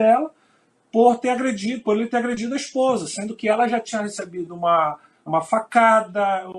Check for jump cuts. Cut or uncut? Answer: cut